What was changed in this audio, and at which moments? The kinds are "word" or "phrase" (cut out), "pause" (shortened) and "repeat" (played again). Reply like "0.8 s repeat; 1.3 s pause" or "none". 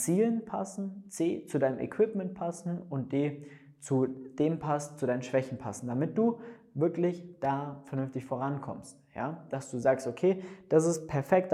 none